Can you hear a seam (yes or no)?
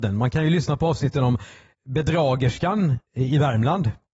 yes